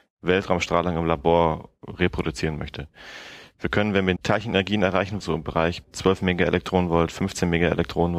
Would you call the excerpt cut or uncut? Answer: cut